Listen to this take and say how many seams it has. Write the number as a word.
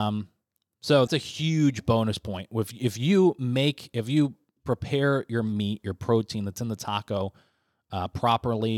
one